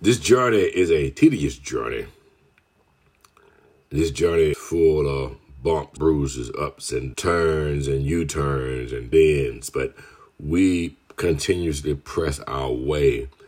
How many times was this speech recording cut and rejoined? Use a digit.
4